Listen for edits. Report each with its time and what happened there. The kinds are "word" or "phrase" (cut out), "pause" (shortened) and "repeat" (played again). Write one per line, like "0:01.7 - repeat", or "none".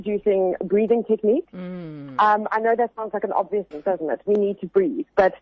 0:03.7 - word